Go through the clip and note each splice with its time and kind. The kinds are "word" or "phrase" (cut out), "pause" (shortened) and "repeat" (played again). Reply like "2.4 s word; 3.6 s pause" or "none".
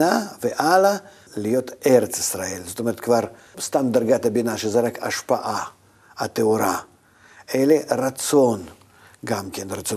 1.3 s word; 3.5 s word